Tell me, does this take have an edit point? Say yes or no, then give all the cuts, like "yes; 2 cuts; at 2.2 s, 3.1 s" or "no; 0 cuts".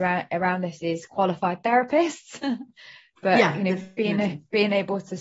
no; 0 cuts